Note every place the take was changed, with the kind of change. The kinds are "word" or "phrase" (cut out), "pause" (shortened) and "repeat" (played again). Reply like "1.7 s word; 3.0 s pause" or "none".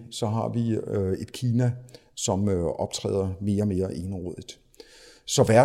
none